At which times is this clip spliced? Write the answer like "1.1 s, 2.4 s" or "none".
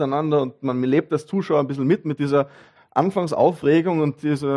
none